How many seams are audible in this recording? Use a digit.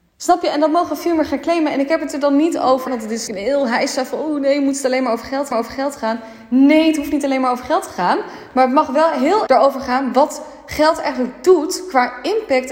4